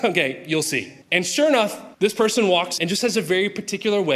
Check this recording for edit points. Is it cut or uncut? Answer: cut